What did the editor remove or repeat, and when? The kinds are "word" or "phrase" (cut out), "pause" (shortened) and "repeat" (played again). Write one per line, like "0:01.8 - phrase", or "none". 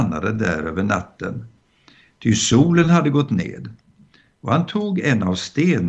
none